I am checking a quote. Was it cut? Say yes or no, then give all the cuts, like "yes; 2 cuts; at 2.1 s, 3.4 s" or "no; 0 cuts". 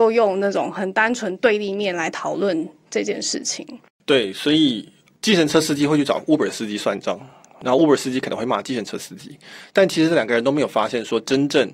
no; 0 cuts